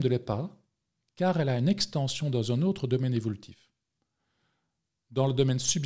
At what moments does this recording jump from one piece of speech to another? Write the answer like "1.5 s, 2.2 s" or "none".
none